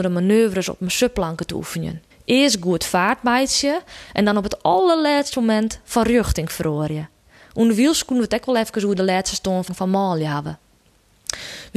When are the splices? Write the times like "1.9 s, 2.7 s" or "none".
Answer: 2.1 s, 9.7 s